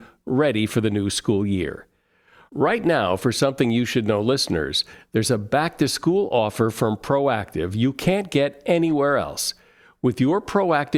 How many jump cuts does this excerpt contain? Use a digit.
0